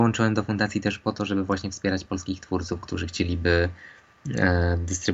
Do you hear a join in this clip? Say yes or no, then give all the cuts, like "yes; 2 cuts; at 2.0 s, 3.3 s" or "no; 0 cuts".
no; 0 cuts